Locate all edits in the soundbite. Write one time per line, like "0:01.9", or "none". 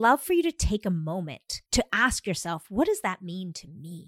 0:01.7